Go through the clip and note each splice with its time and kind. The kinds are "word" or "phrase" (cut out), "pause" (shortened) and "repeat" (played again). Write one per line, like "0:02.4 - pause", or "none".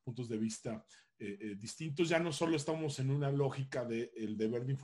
none